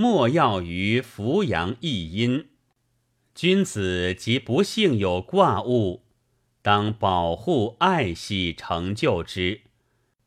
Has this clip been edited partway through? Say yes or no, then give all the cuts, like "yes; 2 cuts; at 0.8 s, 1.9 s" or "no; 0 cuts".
no; 0 cuts